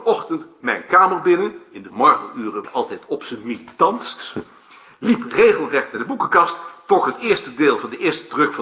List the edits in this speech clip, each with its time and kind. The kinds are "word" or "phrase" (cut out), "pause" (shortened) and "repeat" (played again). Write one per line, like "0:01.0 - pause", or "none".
0:01.9 - word
0:02.6 - word